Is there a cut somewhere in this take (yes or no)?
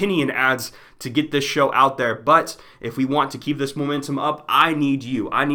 no